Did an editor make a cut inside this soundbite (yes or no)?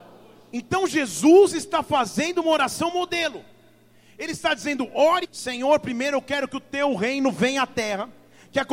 yes